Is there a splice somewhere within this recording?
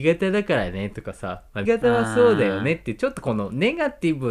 yes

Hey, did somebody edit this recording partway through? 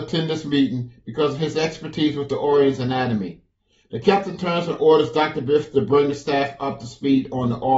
no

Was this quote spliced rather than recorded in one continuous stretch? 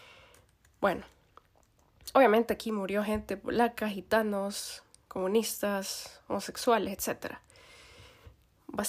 no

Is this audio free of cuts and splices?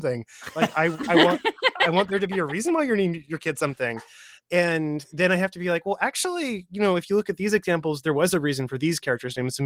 yes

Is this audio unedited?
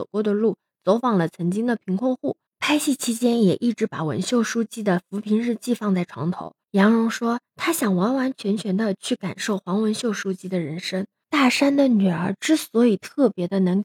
no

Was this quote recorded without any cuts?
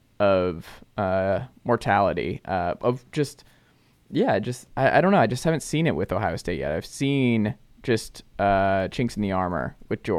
yes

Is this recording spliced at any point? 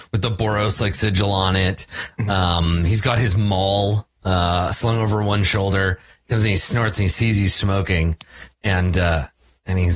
no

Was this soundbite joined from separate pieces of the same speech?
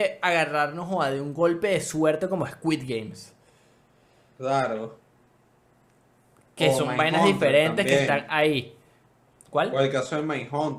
no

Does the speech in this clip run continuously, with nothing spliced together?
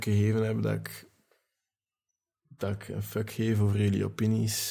yes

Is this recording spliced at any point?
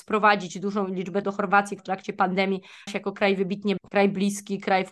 yes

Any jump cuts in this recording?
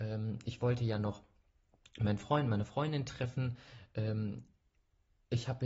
no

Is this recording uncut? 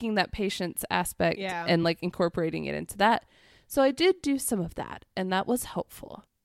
yes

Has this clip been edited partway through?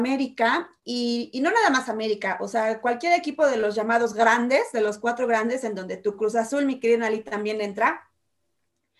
no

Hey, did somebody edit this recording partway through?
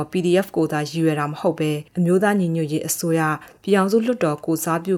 yes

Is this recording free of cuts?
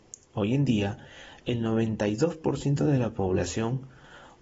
yes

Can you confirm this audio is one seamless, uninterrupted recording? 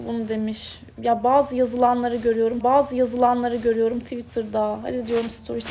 no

